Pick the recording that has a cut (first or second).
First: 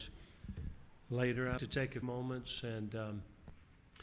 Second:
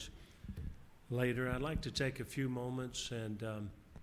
first